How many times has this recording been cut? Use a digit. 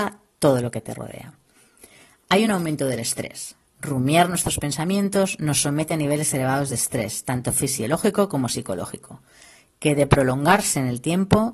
0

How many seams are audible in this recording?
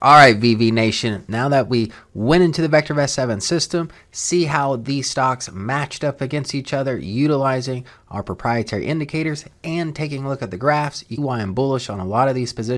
1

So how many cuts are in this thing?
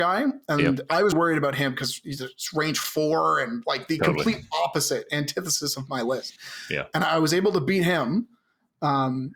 1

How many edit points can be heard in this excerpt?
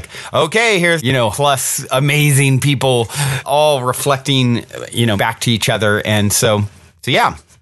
4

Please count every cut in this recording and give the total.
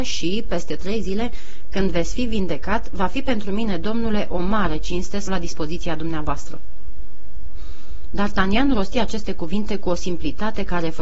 1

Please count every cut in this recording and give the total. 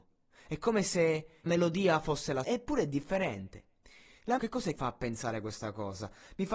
4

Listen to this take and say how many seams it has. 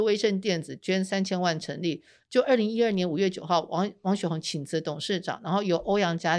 0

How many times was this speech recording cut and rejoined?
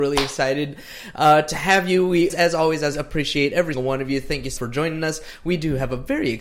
4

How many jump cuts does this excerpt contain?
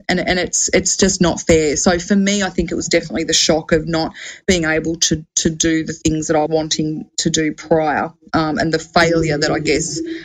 1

